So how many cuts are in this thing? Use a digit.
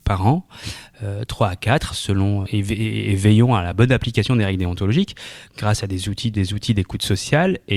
2